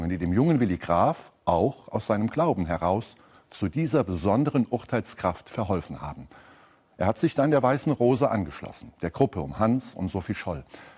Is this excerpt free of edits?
yes; 0 cuts

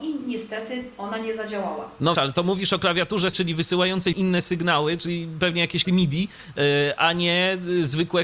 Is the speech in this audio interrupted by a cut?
yes; 4 cuts; at 2.1 s, 3.3 s, 4.1 s, 5.8 s

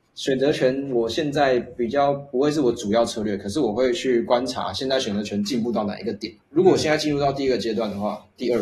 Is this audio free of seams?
no; 1 cut; at 6.4 s

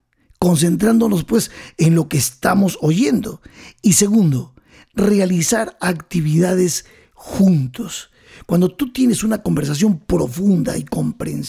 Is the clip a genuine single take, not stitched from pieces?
yes; 0 cuts

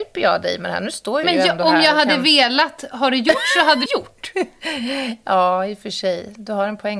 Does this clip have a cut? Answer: yes; 2 cuts; at 1.2 s, 3.9 s

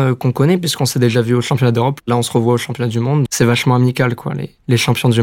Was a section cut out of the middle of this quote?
yes; 1 cut; at 3.3 s

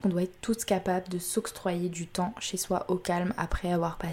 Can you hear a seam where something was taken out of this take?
no; 0 cuts

